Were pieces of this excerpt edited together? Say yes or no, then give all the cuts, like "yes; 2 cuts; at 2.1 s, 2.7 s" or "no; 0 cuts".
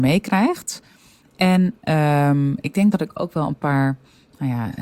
no; 0 cuts